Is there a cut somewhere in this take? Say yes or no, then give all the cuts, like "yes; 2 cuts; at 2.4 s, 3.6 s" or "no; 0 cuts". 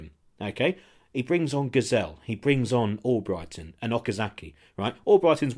no; 0 cuts